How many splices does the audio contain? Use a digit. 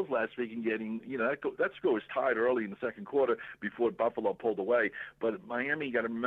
0